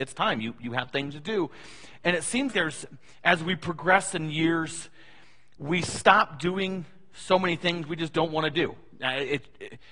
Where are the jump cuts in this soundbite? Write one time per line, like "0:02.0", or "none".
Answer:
0:02.5